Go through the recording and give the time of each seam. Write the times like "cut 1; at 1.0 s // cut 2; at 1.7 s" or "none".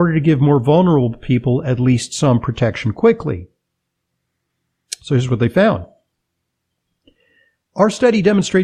none

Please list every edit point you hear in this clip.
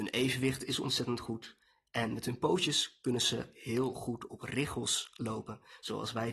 none

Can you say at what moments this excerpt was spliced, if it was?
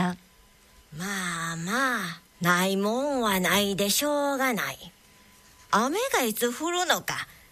cut 1; at 2.3 s

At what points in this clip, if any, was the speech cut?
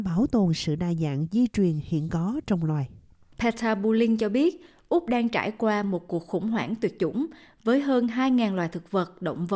none

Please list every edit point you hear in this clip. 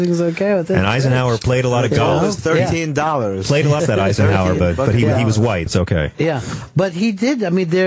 cut 1; at 3.8 s // cut 2; at 5.7 s

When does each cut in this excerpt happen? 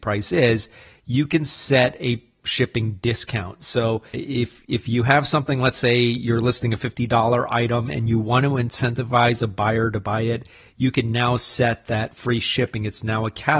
cut 1; at 4.1 s

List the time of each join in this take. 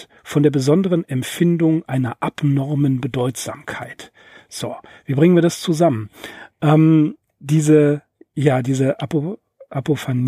none

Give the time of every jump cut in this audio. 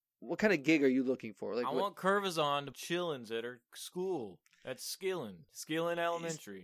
cut 1; at 2.7 s // cut 2; at 5.5 s

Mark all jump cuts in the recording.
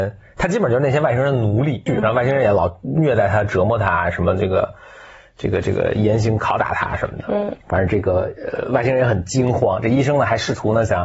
cut 1; at 1.9 s // cut 2; at 7.6 s

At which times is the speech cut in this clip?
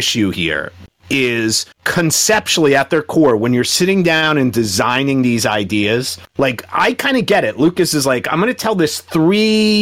cut 1; at 1.7 s // cut 2; at 6.3 s

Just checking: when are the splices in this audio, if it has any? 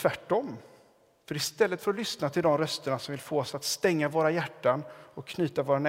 none

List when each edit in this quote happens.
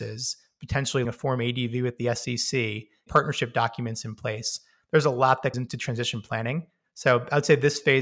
cut 1; at 1.0 s // cut 2; at 3.1 s // cut 3; at 5.5 s

